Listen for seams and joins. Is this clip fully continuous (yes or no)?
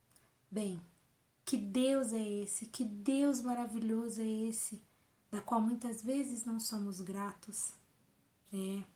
yes